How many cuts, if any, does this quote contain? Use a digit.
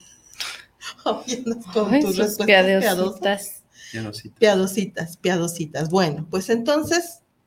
0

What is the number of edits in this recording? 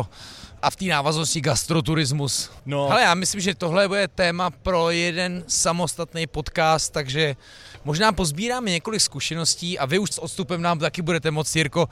1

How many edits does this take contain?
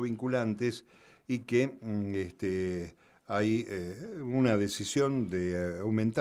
0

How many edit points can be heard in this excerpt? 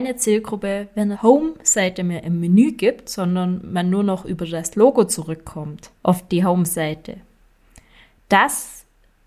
2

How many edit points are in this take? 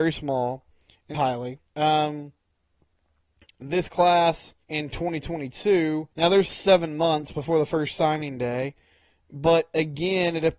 5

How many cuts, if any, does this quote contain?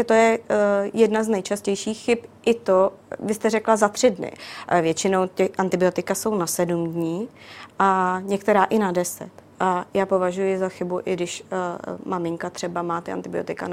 0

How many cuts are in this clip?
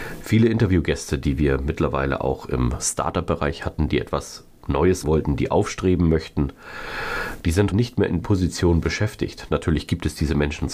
3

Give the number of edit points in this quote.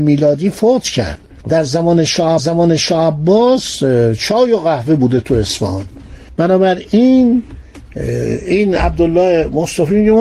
2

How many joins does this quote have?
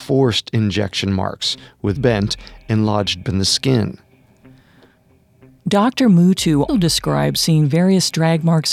3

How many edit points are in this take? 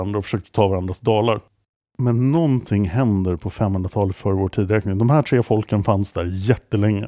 0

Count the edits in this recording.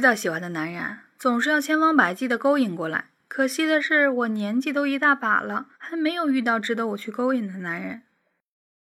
1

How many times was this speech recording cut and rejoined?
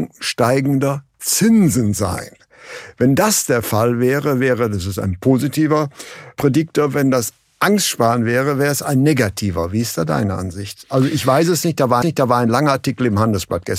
1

